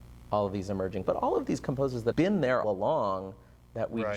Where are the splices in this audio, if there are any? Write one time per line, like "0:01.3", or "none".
0:01.0
0:02.1
0:02.6